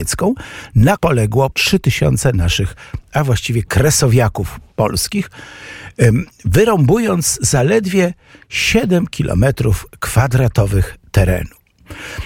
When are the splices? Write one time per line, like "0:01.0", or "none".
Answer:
0:01.0
0:01.5